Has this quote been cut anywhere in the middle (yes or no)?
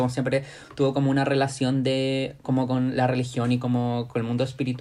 no